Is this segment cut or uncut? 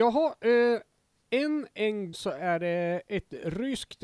cut